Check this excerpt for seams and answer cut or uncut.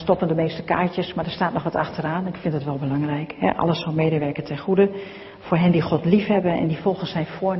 uncut